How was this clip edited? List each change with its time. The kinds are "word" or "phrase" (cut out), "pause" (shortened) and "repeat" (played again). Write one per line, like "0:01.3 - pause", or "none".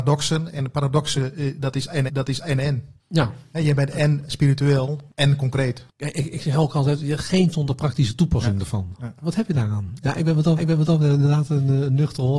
0:02.1 - repeat
0:04.3 - word
0:05.9 - pause
0:07.5 - word
0:10.6 - repeat